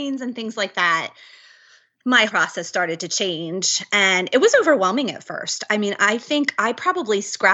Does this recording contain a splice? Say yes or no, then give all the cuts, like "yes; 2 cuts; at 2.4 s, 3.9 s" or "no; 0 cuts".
yes; 1 cut; at 2.3 s